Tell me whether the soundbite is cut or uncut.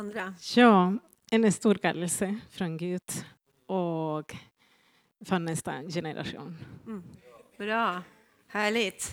uncut